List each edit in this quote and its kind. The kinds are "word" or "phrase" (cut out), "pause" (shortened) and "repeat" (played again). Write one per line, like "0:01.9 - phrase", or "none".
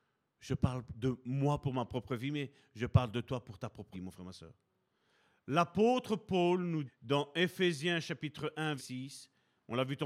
0:03.9 - word
0:06.9 - word
0:08.8 - word

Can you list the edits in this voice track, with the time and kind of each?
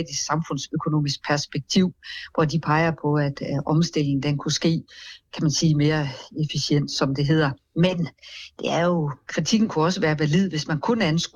none

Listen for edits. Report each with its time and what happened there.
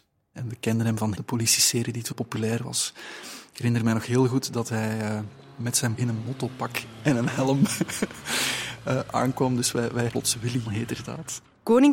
0:01.1 - word
0:02.1 - word
0:05.9 - word
0:10.1 - word
0:10.7 - word

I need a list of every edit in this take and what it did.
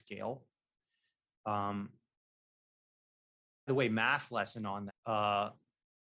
0:03.7 - word
0:04.9 - word

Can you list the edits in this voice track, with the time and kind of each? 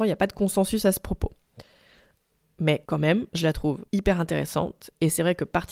none

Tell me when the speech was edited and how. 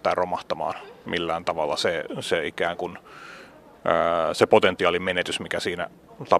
none

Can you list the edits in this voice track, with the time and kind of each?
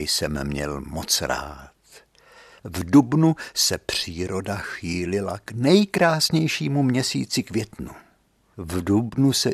none

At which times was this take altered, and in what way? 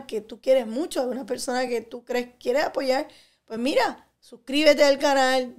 none

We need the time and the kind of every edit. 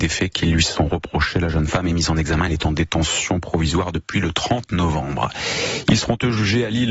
none

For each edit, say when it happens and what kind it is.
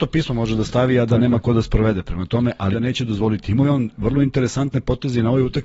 0:02.7 - word

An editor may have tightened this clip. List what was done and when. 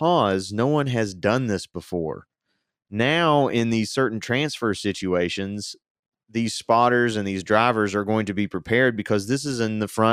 none

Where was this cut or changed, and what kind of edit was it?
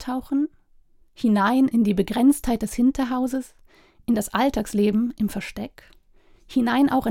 none

